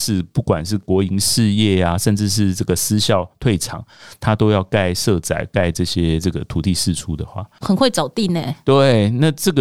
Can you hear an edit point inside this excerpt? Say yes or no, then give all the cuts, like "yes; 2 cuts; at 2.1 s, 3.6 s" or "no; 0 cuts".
yes; 1 cut; at 7.6 s